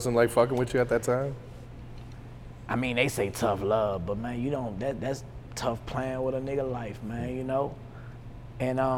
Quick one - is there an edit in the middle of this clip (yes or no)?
no